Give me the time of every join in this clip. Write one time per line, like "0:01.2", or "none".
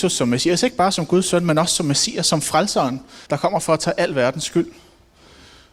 0:03.3